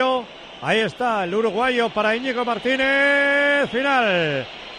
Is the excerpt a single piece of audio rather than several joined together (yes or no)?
yes